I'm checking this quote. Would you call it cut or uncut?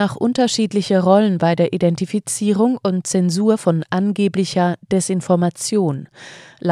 uncut